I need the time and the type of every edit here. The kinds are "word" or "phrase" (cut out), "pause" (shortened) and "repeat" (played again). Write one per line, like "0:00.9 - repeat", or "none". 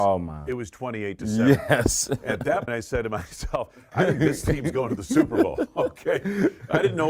0:02.7 - word